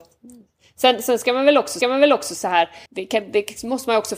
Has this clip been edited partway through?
yes; 2 cuts; at 1.8 s, 2.9 s

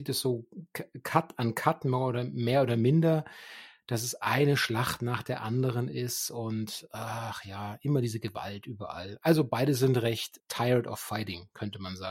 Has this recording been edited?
yes; 1 cut; at 10.4 s

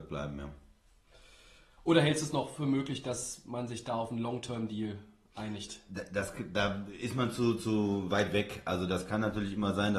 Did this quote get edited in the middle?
no; 0 cuts

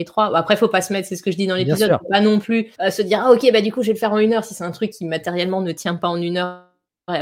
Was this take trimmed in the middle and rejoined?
yes; 1 cut; at 2.7 s

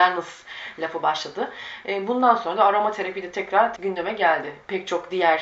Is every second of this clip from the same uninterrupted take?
no; 1 cut; at 3.8 s

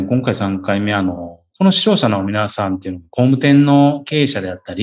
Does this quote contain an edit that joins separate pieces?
yes; 1 cut; at 1.5 s

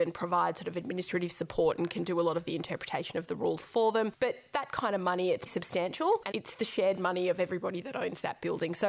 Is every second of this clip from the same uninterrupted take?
no; 2 cuts; at 5.5 s, 6.3 s

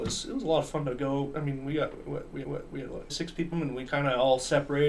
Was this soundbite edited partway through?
yes; 4 cuts; at 2.4 s, 3.1 s, 3.5 s, 3.9 s

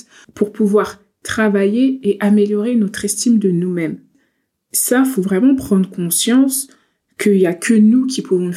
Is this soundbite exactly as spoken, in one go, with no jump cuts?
yes; 0 cuts

